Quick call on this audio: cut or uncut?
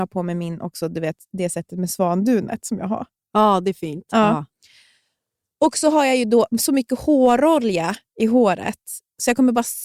uncut